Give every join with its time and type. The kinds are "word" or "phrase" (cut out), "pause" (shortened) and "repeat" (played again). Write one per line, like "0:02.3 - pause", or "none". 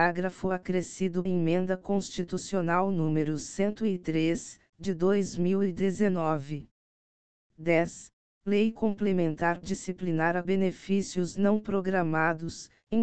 0:01.3 - word
0:08.2 - pause
0:09.6 - word
0:10.4 - phrase